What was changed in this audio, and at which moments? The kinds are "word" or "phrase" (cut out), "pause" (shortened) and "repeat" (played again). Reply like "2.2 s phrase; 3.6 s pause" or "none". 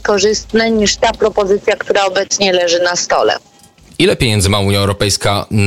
none